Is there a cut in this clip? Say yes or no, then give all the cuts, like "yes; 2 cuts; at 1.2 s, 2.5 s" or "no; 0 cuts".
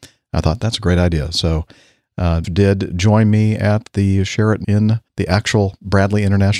yes; 3 cuts; at 2.4 s, 4.6 s, 5.1 s